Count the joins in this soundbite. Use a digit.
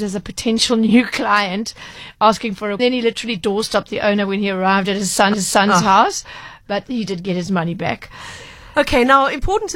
2